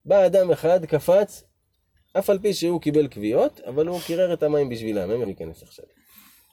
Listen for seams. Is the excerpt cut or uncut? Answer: cut